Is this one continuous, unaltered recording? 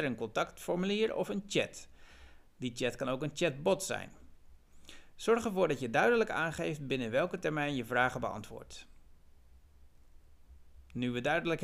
yes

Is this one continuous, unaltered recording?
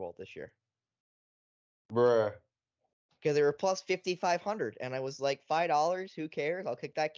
yes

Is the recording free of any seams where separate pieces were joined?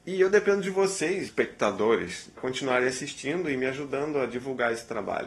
no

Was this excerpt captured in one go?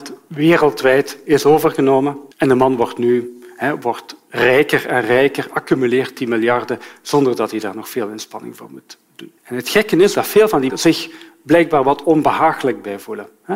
no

